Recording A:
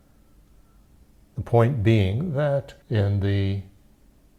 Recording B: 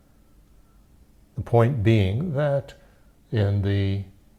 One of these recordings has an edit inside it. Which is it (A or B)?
A